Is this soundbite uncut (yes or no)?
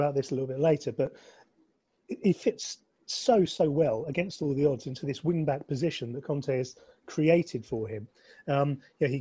yes